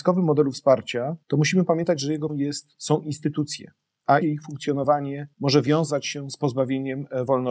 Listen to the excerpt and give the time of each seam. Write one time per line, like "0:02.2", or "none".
0:01.2
0:02.3
0:04.2
0:05.3